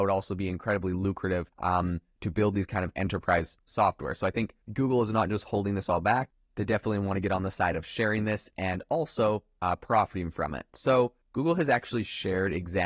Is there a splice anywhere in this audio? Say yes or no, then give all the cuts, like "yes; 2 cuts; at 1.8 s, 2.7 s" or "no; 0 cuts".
yes; 2 cuts; at 1.5 s, 4.6 s